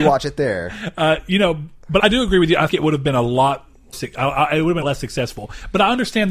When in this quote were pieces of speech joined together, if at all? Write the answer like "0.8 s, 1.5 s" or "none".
2.0 s, 2.7 s, 3.9 s, 4.8 s